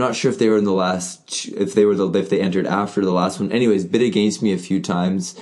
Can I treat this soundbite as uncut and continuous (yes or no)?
yes